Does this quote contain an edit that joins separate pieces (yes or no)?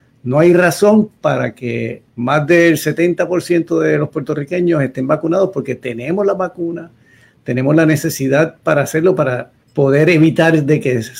yes